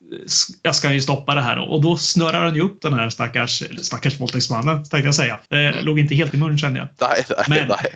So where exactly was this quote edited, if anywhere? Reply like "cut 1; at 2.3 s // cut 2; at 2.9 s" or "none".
cut 1; at 3.8 s // cut 2; at 5.5 s // cut 3; at 6.3 s